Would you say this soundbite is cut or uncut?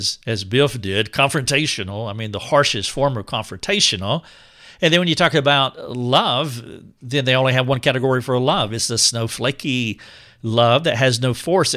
uncut